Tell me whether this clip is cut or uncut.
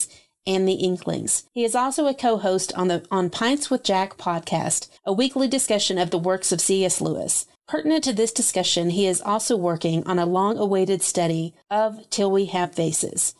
cut